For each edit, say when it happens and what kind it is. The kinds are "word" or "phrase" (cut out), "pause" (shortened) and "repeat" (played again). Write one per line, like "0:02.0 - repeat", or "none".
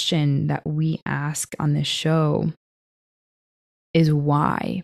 none